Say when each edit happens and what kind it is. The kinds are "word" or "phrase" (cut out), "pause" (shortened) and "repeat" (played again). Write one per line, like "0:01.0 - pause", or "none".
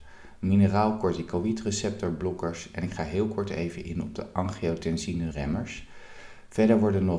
0:05.3 - phrase